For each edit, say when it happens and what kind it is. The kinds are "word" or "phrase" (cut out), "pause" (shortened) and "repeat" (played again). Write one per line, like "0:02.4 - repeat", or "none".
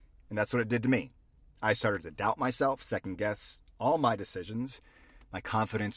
none